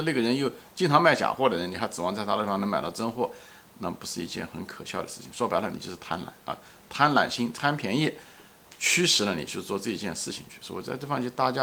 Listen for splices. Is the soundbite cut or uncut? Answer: uncut